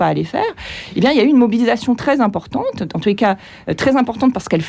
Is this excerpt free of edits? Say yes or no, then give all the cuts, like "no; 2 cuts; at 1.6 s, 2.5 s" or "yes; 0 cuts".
yes; 0 cuts